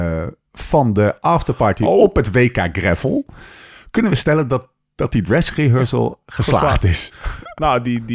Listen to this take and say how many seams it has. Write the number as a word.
zero